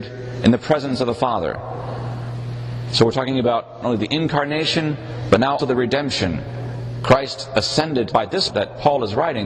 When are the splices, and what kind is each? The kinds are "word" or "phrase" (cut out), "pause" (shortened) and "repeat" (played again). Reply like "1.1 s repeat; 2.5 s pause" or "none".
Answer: 3.8 s word; 5.6 s word; 8.1 s word; 8.5 s word